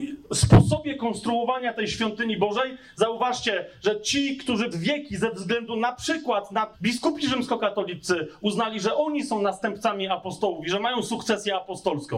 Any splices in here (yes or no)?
yes